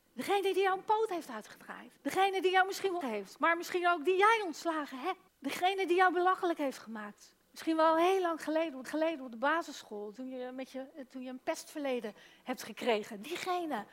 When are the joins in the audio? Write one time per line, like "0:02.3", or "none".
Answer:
0:02.0
0:03.0
0:05.3
0:07.4
0:08.8

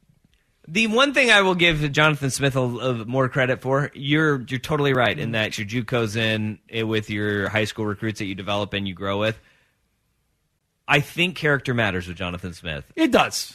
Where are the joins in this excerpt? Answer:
0:05.5

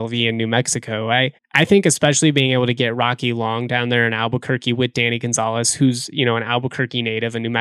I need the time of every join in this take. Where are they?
0:01.4

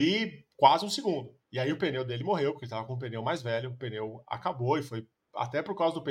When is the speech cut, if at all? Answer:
0:01.4

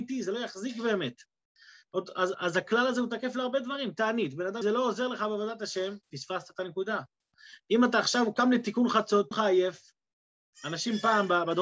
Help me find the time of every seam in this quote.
0:02.3
0:04.6
0:06.0
0:09.3

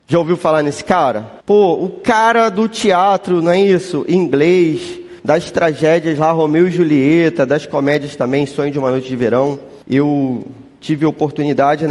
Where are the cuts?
0:01.4
0:05.2
0:09.8

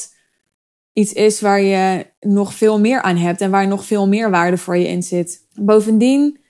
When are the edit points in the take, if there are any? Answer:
0:05.5

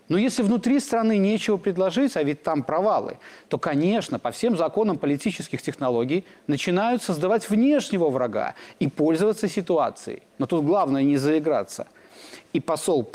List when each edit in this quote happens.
0:10.3

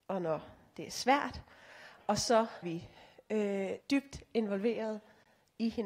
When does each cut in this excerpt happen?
0:02.6
0:03.8

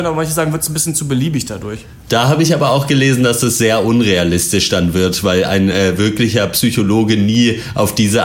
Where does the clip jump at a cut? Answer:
none

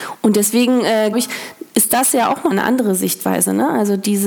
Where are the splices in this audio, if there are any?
0:01.1
0:02.5

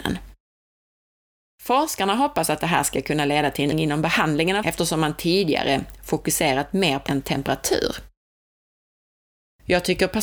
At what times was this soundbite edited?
0:03.7
0:04.6
0:07.1

